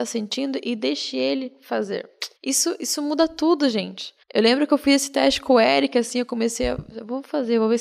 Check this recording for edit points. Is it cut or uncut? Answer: cut